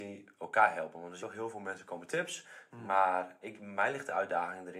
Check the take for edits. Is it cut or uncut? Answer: cut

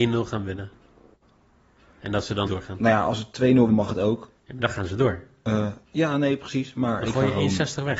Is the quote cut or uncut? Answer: cut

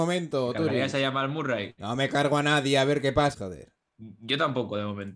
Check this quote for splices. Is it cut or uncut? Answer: cut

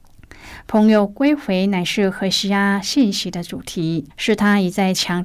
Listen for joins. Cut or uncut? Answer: cut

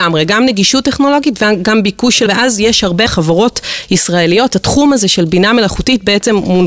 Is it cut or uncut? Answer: cut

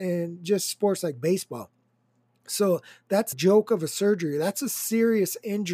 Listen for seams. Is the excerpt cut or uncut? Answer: cut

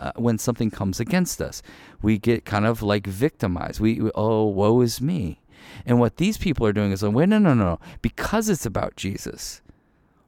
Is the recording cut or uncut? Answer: uncut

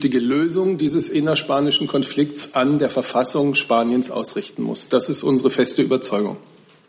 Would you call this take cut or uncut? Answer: uncut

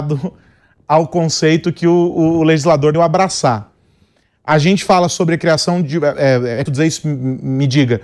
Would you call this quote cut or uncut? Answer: cut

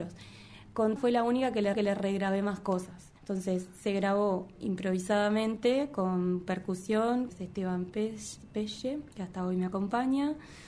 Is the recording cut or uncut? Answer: cut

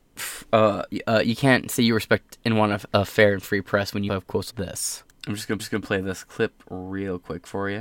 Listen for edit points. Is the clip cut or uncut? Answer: cut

